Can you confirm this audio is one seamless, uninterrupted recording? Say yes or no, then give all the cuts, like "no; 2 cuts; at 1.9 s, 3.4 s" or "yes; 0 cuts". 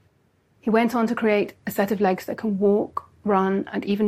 no; 1 cut; at 1.6 s